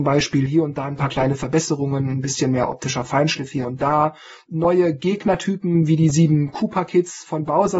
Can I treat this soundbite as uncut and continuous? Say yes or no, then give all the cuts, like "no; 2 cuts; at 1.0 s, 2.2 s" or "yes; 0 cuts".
yes; 0 cuts